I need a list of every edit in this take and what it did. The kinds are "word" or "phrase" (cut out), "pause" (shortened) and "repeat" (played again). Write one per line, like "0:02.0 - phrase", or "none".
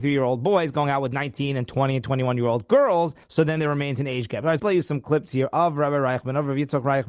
0:03.2 - pause
0:04.6 - phrase